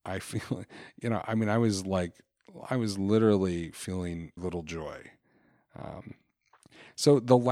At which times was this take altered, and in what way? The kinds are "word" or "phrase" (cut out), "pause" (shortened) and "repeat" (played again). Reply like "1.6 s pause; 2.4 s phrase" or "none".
4.4 s word